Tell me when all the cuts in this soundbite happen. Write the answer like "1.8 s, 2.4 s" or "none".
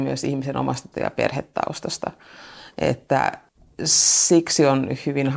0.9 s